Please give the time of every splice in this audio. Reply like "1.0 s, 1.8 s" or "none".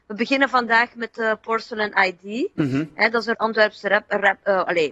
3.3 s